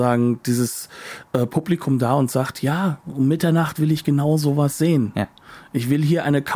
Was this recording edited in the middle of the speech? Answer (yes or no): no